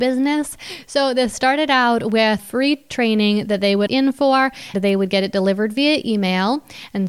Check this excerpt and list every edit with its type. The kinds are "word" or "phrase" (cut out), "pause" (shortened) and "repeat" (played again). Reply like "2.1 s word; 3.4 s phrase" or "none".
2.4 s word; 3.9 s word; 4.7 s word